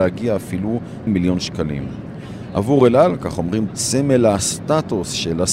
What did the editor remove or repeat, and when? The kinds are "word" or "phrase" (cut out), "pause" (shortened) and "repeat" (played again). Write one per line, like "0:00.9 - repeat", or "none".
0:01.1 - word
0:03.7 - word